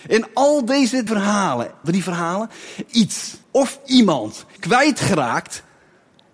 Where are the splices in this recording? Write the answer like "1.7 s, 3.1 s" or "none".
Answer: 1.1 s, 1.8 s, 2.9 s, 3.4 s, 4.6 s